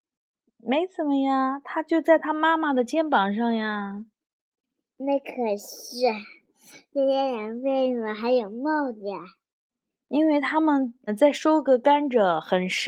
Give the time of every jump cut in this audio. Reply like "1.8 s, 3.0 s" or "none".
11.1 s